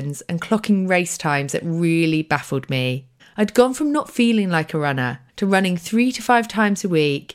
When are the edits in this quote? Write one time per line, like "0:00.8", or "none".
0:03.2
0:05.3